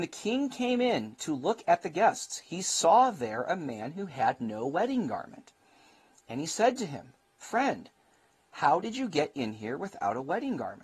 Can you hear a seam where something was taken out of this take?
no; 0 cuts

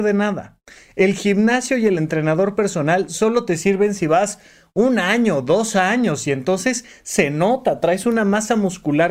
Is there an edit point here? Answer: no; 0 cuts

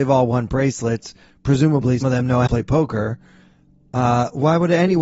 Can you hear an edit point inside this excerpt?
yes; 2 cuts; at 2.0 s, 2.5 s

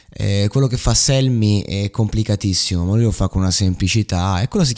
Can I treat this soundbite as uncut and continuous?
yes; 0 cuts

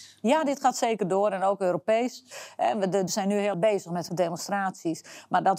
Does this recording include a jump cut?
yes; 3 cuts; at 3.1 s, 3.5 s, 4.1 s

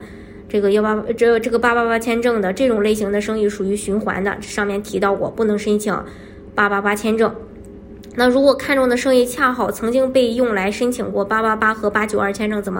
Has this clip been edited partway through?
no; 0 cuts

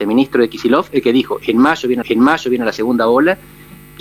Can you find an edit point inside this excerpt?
yes; 1 cut; at 2.0 s

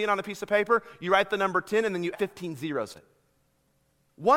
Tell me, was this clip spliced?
yes; 2 cuts; at 2.1 s, 2.9 s

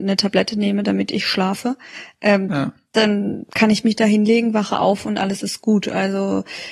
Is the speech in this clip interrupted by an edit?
no; 0 cuts

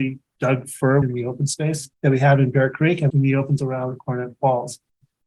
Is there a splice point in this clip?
yes; 4 cuts; at 1.0 s, 1.9 s, 3.1 s, 3.6 s

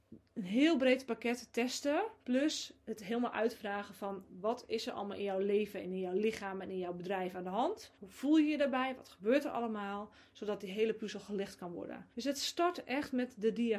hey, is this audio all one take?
no; 3 cuts; at 2.2 s, 7.9 s, 12.1 s

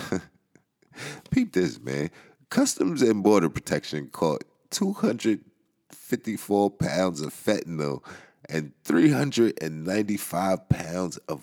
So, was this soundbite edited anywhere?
no; 0 cuts

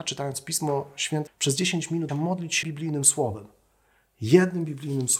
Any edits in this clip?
yes; 3 cuts; at 1.3 s, 2.1 s, 2.6 s

